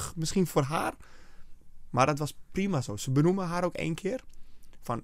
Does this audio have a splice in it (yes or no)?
no